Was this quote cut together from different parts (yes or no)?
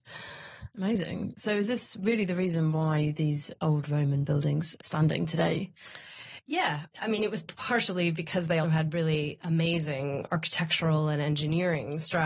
yes